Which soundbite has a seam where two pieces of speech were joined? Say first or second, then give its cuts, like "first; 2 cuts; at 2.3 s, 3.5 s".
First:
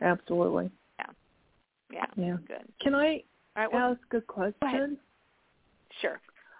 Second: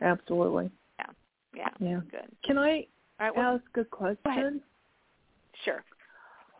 second; 1 cut; at 1.2 s